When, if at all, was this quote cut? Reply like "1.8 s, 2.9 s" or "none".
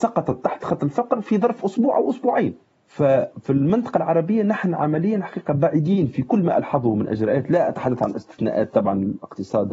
none